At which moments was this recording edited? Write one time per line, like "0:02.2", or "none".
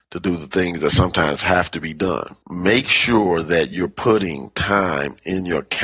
0:02.4